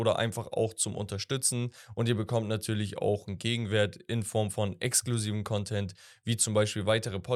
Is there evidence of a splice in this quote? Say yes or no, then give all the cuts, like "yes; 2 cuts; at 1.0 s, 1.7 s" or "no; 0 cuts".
no; 0 cuts